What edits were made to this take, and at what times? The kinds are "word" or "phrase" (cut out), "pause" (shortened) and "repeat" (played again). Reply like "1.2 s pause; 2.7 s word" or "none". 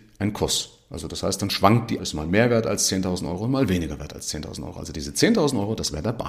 2.0 s word